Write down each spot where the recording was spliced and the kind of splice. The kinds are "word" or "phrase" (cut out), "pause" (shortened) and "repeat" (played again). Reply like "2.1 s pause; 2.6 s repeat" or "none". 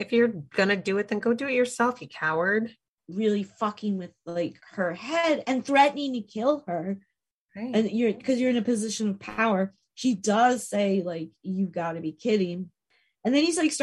none